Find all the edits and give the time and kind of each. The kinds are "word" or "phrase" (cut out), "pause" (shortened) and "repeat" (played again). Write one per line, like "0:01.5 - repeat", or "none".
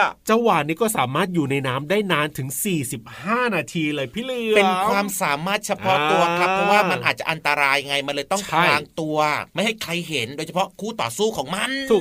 0:09.5 - pause